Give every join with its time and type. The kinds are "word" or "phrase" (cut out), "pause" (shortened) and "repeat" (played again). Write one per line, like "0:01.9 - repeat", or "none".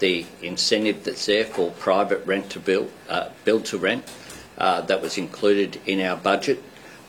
0:03.4 - pause